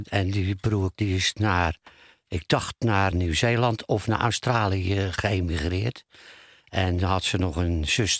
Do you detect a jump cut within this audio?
yes; 2 cuts; at 0.9 s, 3.1 s

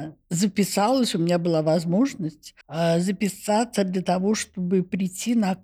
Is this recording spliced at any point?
yes; 1 cut; at 2.6 s

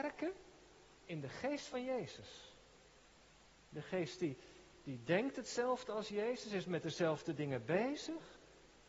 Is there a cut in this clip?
no; 0 cuts

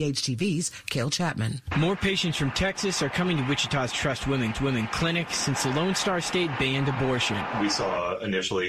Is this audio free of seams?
no; 1 cut; at 4.5 s

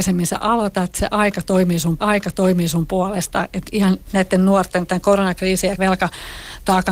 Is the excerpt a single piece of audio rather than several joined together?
no; 4 cuts; at 2.0 s, 3.6 s, 4.0 s, 5.8 s

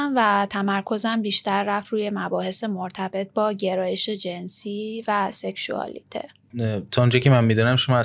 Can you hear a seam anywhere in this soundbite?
no; 0 cuts

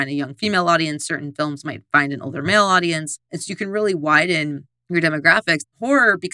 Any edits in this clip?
no; 0 cuts

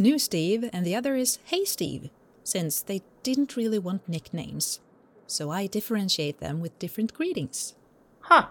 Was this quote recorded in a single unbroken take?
yes; 0 cuts

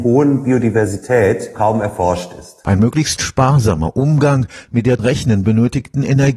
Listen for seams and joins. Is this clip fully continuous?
no; 2 cuts; at 1.5 s, 5.0 s

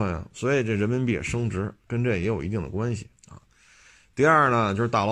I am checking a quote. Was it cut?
yes; 2 cuts; at 1.8 s, 3.2 s

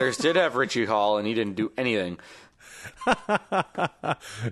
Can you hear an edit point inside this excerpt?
no; 0 cuts

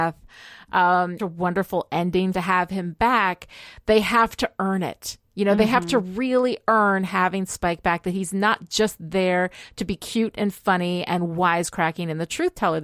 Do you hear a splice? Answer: yes; 2 cuts; at 1.2 s, 2.3 s

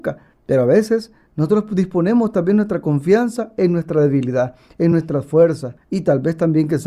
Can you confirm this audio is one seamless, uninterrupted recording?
yes; 0 cuts

